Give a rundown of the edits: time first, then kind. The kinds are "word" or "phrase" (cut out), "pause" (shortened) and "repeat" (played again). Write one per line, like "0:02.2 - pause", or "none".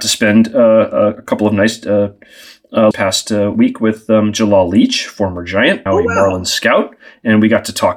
0:02.9 - phrase
0:05.9 - word